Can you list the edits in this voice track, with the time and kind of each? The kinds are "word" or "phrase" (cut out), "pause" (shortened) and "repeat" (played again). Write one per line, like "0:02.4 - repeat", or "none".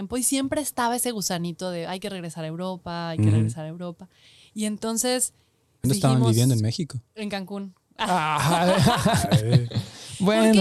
0:05.8 - word